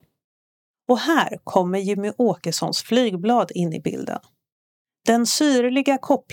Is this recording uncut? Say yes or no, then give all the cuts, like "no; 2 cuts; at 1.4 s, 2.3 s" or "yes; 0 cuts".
yes; 0 cuts